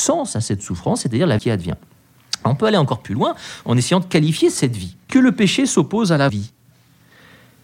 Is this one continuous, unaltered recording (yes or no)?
no